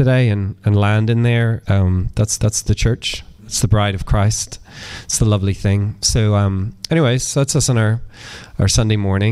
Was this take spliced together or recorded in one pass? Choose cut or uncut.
cut